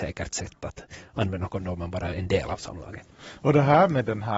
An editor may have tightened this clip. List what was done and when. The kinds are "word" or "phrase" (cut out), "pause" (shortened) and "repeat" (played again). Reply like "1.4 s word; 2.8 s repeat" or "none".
2.1 s word